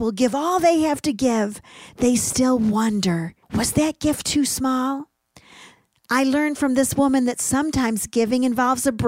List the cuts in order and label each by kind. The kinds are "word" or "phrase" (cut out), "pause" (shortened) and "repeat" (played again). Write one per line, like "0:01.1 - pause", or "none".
0:03.4 - pause